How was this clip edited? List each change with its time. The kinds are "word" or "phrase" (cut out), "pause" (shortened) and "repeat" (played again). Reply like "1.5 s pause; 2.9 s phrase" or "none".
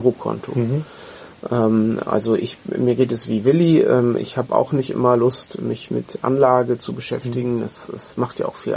none